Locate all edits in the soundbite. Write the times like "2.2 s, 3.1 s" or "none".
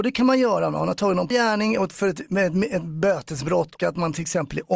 1.3 s, 3.8 s